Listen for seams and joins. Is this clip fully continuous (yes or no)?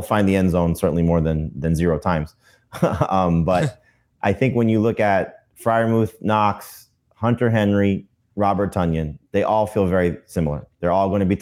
yes